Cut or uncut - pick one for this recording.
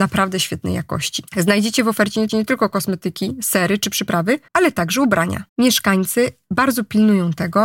cut